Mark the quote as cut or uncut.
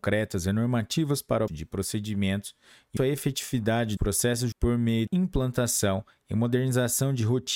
cut